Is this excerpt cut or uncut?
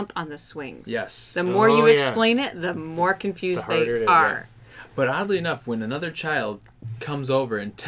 uncut